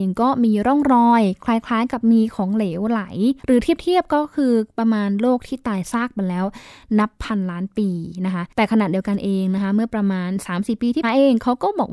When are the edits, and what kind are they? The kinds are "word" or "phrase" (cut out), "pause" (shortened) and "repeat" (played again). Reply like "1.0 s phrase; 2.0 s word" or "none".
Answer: 3.4 s pause; 8.5 s pause; 11.0 s phrase